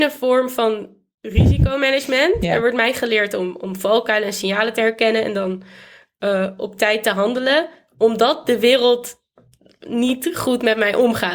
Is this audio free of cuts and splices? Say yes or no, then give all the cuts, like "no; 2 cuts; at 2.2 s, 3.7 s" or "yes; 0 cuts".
yes; 0 cuts